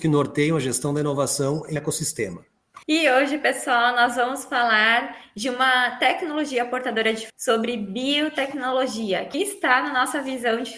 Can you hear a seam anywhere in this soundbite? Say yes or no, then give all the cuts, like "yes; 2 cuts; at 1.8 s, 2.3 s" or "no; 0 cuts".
yes; 4 cuts; at 1.8 s, 2.8 s, 7.3 s, 9.3 s